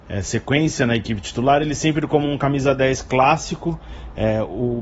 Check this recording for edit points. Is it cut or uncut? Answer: uncut